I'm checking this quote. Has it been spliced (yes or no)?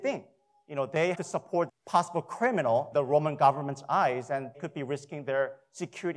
yes